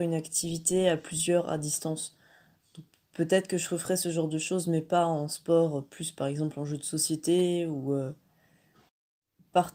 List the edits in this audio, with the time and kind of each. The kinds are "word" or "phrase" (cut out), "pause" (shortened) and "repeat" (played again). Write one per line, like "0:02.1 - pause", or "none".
none